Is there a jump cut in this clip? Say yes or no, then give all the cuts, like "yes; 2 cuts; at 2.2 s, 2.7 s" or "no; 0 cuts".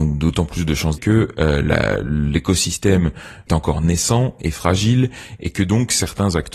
yes; 2 cuts; at 1.0 s, 3.5 s